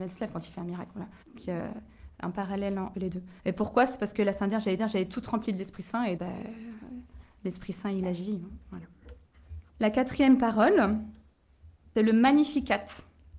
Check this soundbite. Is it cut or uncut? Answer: cut